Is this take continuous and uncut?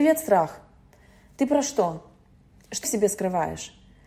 no; 1 cut; at 2.8 s

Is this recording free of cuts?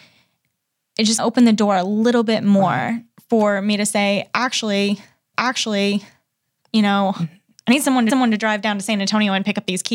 no; 4 cuts; at 1.2 s, 5.3 s, 7.5 s, 8.1 s

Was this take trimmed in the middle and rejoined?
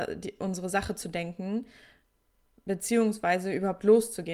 yes; 1 cut; at 1.0 s

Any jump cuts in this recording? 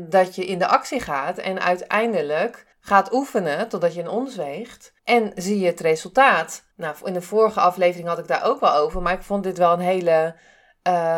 yes; 3 cuts; at 2.7 s, 5.0 s, 6.7 s

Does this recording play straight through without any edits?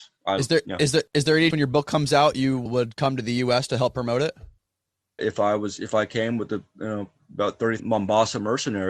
no; 4 cuts; at 1.5 s, 2.7 s, 5.2 s, 7.8 s

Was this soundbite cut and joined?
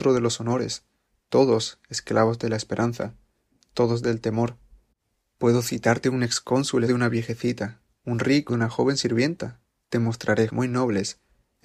yes; 3 cuts; at 6.9 s, 8.5 s, 10.5 s

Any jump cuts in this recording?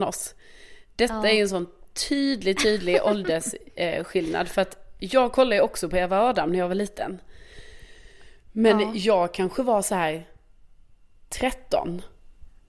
no; 0 cuts

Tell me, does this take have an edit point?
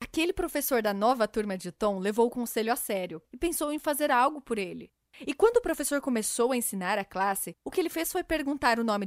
no; 0 cuts

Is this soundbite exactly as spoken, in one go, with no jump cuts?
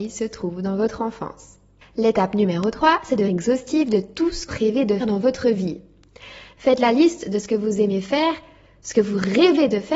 no; 4 cuts; at 1.8 s, 3.3 s, 4.5 s, 5.0 s

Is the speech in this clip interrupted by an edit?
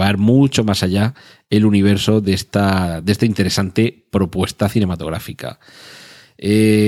no; 0 cuts

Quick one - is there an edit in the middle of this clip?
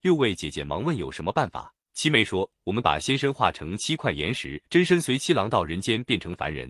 yes; 2 cuts; at 1.8 s, 4.6 s

